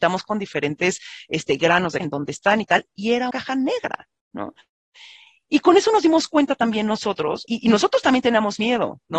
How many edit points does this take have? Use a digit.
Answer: 4